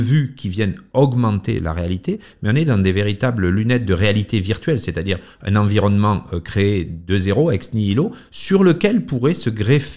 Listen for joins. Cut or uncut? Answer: uncut